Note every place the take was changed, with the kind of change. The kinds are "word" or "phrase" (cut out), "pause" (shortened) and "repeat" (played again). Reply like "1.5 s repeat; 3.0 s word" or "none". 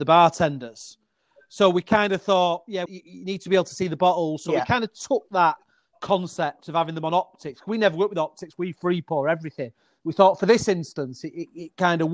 2.9 s word